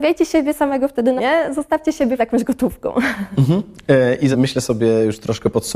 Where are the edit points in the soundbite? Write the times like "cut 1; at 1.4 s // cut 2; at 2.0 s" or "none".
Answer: cut 1; at 1.2 s // cut 2; at 2.2 s // cut 3; at 4.3 s